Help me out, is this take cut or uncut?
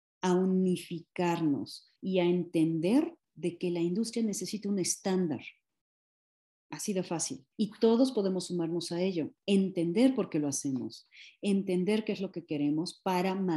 cut